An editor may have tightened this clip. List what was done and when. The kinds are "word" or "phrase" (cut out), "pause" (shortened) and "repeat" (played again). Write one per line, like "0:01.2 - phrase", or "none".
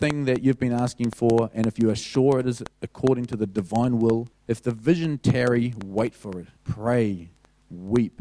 0:02.7 - pause
0:04.3 - pause
0:06.6 - pause